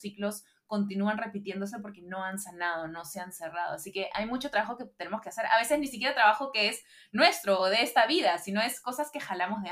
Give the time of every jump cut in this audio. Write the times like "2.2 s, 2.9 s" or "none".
none

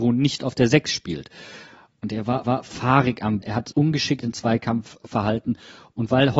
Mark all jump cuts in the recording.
2.4 s, 3.4 s, 3.7 s, 4.2 s

